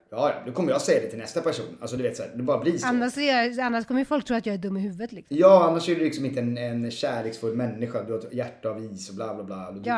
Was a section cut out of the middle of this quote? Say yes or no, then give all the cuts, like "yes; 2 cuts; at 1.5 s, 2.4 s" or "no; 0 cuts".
no; 0 cuts